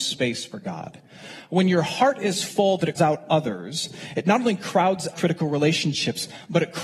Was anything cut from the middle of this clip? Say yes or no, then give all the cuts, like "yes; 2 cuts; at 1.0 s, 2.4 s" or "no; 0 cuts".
yes; 2 cuts; at 3.0 s, 5.1 s